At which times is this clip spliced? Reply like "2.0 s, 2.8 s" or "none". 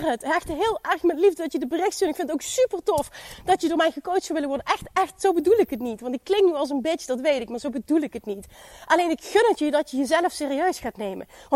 none

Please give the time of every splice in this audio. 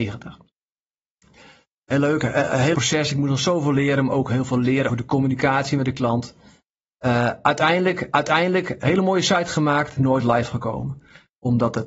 2.7 s, 4.9 s, 8.1 s, 10.0 s

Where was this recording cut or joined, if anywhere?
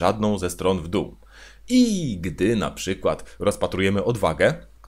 none

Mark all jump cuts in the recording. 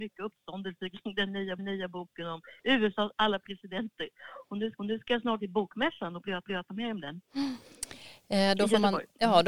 1.6 s, 4.8 s, 5.4 s, 6.4 s

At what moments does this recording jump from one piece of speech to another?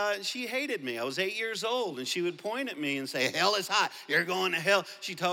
none

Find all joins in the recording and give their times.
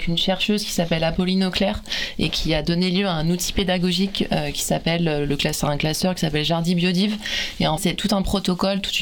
7.8 s

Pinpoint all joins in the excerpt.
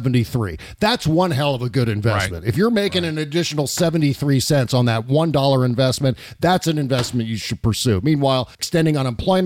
8.5 s

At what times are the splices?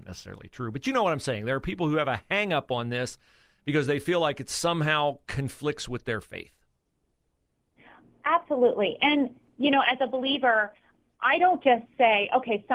none

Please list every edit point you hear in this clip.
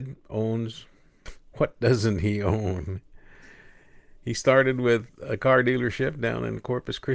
none

